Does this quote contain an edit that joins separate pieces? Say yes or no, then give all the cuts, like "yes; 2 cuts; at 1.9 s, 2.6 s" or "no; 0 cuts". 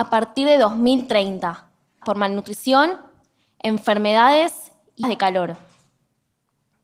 yes; 2 cuts; at 2.0 s, 5.0 s